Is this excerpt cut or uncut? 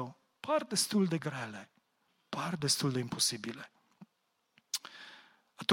uncut